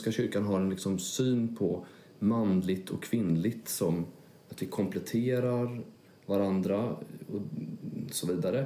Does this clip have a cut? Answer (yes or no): no